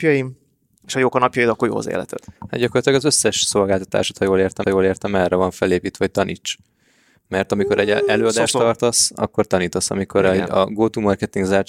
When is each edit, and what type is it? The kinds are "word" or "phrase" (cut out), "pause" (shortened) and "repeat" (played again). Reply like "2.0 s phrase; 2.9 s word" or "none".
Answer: 4.6 s repeat